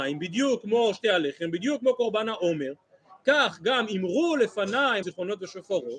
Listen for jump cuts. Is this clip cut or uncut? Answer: cut